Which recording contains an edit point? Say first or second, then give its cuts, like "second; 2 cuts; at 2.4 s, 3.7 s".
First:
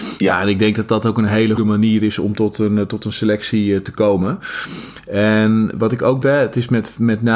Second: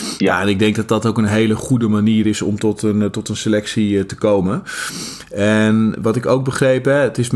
first; 2 cuts; at 1.6 s, 6.2 s